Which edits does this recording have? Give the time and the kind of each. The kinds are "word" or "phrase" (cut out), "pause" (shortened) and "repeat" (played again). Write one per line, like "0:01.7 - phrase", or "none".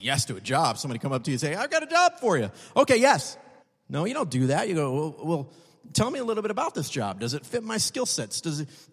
0:03.6 - pause